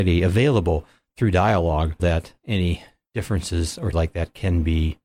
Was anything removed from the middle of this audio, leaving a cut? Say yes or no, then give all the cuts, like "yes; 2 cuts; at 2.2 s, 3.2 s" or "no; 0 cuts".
yes; 2 cuts; at 2.0 s, 3.9 s